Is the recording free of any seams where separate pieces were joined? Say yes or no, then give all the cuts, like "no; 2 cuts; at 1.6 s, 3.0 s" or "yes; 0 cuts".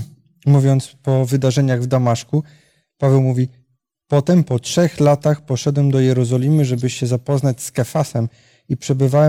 yes; 0 cuts